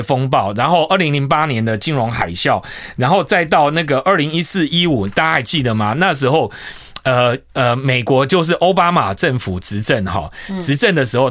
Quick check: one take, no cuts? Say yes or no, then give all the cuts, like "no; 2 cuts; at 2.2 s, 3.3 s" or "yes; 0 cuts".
no; 1 cut; at 7.5 s